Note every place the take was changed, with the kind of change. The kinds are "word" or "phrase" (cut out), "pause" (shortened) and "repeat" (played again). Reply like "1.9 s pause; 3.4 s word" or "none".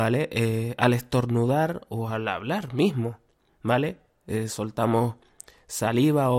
none